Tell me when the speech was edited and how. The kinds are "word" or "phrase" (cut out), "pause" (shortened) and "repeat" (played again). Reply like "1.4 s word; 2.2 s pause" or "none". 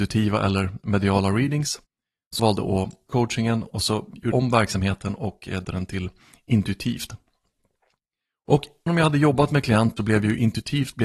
2.4 s word; 3.1 s word; 4.3 s word; 5.6 s word; 8.9 s word; 10.0 s word